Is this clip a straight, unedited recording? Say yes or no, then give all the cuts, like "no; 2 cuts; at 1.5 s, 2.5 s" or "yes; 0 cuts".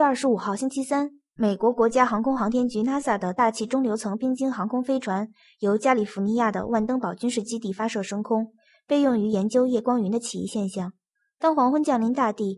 yes; 0 cuts